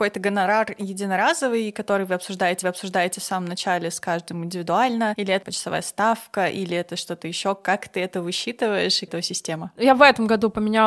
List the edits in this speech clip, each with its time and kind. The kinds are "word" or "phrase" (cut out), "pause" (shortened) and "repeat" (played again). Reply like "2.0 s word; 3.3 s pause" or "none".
2.6 s repeat; 5.4 s phrase; 9.1 s phrase